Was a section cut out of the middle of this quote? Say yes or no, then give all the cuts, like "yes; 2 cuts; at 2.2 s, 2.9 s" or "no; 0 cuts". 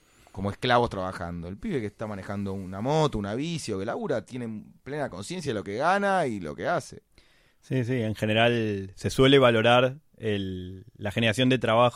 no; 0 cuts